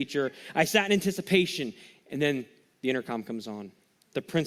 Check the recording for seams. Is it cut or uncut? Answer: uncut